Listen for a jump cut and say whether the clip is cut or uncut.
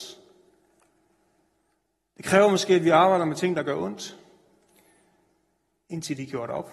uncut